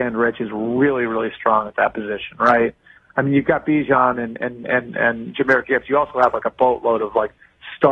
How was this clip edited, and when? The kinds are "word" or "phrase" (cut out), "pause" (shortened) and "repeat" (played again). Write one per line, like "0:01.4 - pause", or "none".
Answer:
none